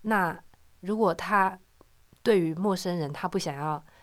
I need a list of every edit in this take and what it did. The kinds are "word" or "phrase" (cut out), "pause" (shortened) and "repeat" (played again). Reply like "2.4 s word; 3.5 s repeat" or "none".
none